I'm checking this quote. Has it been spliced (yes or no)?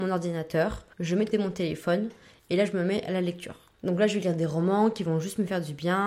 yes